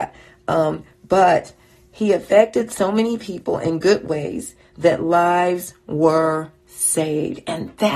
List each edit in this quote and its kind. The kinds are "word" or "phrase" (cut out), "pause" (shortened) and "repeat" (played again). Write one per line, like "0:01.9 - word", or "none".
none